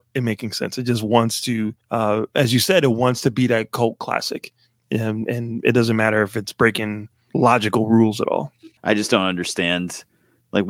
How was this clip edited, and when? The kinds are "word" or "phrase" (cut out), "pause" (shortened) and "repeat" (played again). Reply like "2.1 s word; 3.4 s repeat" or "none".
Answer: 1.8 s pause; 8.8 s pause